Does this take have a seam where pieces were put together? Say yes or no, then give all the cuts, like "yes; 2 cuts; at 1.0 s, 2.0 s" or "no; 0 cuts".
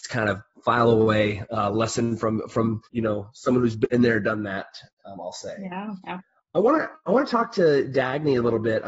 yes; 1 cut; at 2.9 s